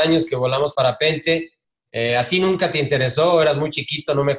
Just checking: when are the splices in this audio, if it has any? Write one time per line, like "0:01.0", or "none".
none